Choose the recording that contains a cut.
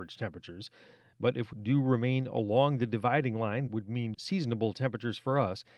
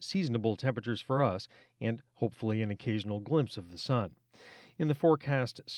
first; 3 cuts; at 1.5 s, 3.7 s, 4.1 s

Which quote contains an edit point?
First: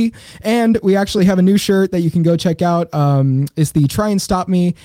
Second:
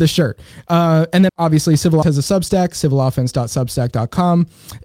second; 2 cuts; at 1.3 s, 2.0 s

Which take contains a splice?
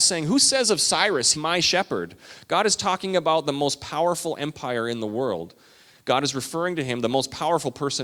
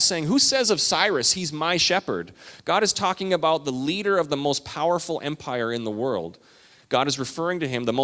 first; 2 cuts; at 1.3 s, 3.4 s

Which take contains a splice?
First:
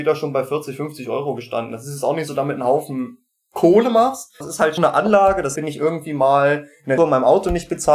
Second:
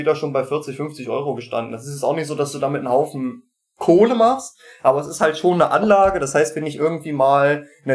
first; 5 cuts; at 2.3 s, 4.4 s, 4.8 s, 5.6 s, 7.0 s

